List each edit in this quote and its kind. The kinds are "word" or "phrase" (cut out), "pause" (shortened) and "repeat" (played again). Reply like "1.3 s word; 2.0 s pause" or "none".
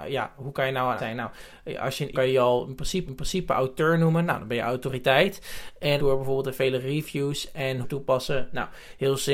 1.0 s word; 2.1 s phrase; 3.1 s repeat; 6.0 s word; 7.8 s phrase